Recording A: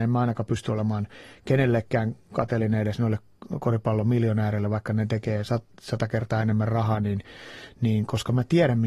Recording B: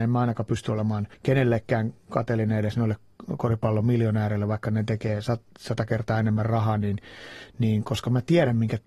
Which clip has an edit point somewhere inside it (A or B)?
B